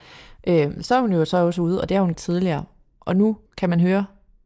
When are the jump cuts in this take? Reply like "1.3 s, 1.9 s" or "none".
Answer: 2.1 s, 3.5 s